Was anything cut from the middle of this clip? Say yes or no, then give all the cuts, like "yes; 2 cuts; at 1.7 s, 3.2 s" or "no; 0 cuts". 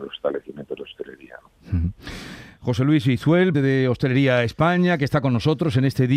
yes; 1 cut; at 3.5 s